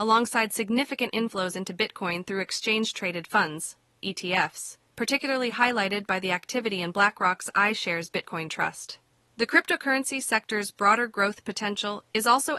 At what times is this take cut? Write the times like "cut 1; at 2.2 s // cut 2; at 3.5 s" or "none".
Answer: cut 1; at 4.9 s // cut 2; at 9.1 s